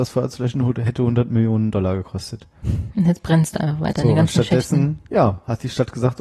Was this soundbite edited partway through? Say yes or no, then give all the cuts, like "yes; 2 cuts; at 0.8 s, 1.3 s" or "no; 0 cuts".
no; 0 cuts